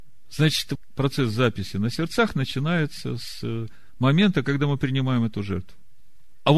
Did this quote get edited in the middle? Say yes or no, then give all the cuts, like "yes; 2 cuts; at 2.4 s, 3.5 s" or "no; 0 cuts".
no; 0 cuts